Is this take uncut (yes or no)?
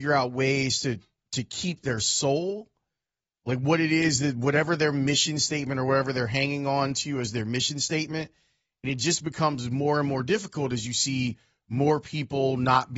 yes